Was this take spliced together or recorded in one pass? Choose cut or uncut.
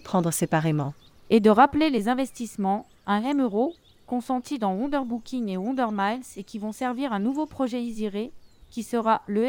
uncut